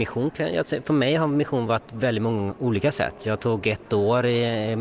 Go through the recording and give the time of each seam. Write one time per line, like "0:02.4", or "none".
none